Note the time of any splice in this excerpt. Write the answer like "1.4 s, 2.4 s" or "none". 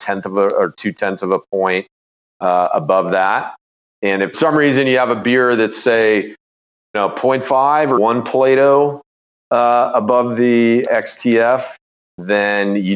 3.9 s, 4.3 s, 6.9 s, 8.0 s, 10.9 s